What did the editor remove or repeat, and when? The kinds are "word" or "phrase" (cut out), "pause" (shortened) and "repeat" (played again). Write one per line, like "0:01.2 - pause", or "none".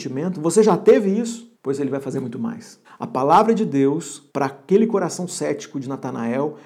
0:01.5 - pause
0:02.8 - pause
0:04.3 - pause